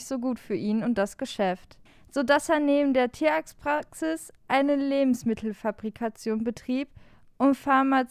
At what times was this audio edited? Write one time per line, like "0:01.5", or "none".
0:01.9
0:04.4